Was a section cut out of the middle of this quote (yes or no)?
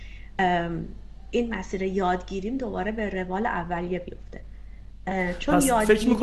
no